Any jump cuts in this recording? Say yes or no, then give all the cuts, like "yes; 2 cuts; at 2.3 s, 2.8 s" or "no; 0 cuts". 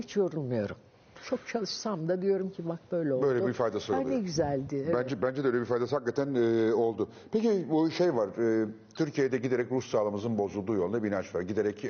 no; 0 cuts